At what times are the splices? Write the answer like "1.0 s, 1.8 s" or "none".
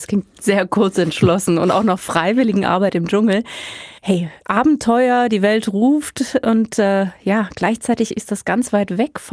4.0 s